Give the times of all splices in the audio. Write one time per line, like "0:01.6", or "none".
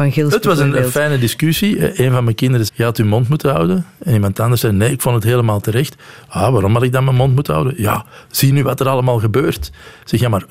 0:02.7